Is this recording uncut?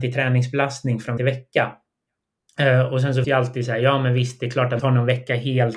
no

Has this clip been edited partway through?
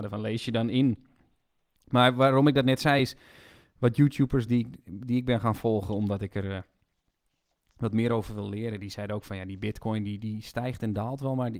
no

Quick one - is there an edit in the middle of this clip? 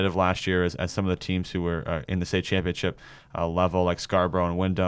no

